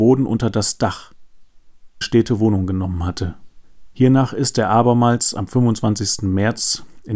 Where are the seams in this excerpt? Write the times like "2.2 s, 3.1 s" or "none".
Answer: 2.0 s